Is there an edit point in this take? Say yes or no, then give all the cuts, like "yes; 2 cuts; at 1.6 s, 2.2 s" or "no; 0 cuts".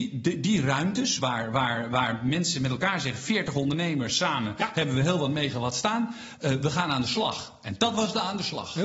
no; 0 cuts